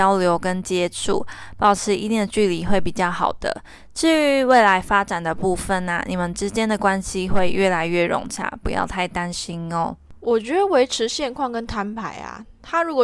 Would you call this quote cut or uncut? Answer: uncut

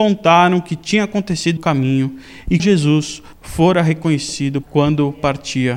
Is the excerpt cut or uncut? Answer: cut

